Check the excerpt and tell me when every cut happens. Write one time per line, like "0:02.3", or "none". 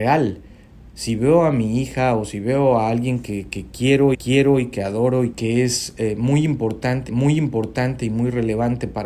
0:04.1
0:05.3
0:07.1